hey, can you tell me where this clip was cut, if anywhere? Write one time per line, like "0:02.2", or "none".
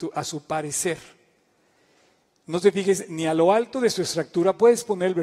none